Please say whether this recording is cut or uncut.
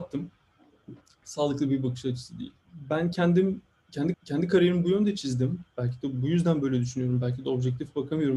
cut